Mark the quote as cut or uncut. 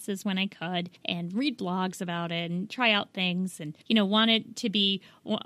cut